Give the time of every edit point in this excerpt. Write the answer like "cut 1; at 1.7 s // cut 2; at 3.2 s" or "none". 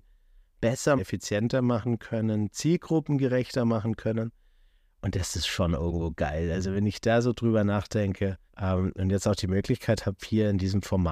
cut 1; at 1.0 s // cut 2; at 8.5 s